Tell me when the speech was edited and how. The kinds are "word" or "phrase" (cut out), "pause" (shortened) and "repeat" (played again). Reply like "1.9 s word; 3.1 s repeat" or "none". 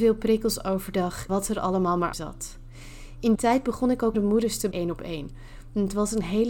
1.3 s word; 2.1 s word; 3.4 s word; 4.1 s word; 4.7 s word